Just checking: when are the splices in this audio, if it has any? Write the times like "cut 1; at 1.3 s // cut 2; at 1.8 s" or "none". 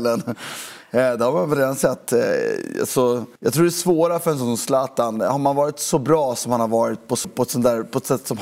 cut 1; at 3.4 s // cut 2; at 7.2 s